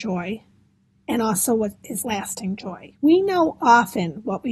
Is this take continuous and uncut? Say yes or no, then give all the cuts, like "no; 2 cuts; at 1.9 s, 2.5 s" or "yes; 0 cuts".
no; 2 cuts; at 2.0 s, 3.0 s